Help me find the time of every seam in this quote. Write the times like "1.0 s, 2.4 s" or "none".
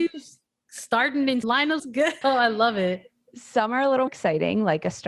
1.4 s, 1.8 s, 2.2 s, 4.1 s